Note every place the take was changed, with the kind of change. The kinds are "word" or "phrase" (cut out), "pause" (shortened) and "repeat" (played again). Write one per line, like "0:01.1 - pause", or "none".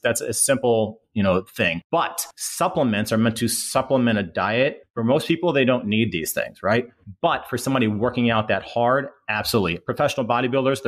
none